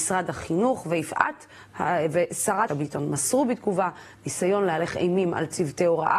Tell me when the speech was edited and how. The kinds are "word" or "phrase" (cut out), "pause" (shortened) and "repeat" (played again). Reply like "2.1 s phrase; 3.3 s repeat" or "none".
2.7 s phrase